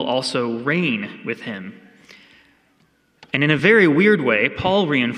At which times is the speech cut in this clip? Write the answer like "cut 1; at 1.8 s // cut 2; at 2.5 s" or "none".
none